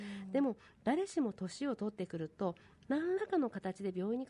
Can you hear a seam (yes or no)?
no